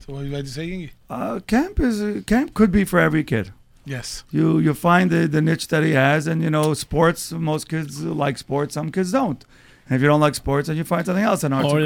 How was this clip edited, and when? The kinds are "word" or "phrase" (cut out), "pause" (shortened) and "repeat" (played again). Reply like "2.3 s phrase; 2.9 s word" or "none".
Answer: none